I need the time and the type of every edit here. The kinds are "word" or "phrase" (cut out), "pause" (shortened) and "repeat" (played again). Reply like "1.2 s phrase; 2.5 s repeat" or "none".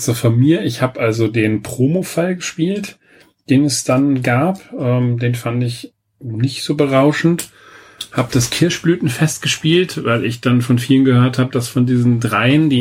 none